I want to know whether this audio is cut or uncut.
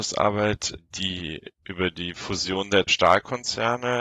cut